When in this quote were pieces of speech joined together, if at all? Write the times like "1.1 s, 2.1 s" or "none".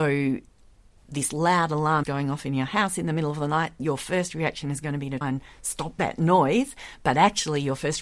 2.0 s, 5.2 s